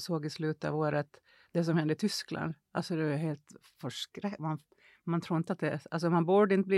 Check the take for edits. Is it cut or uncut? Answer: uncut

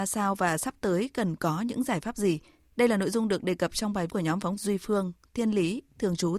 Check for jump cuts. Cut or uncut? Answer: cut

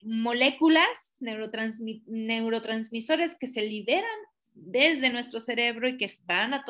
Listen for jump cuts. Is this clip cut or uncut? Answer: uncut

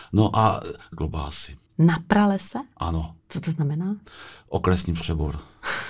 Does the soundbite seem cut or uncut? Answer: cut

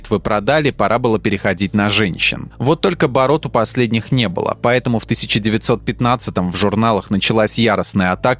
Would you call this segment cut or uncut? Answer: uncut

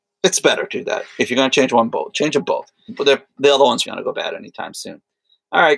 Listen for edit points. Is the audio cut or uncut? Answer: cut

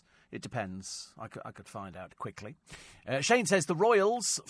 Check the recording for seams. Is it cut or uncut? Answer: cut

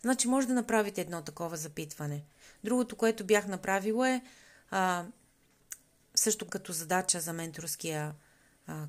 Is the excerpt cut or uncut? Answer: cut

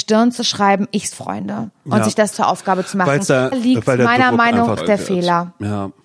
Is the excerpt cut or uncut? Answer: cut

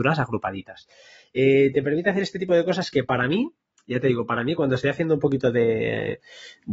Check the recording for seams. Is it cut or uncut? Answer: uncut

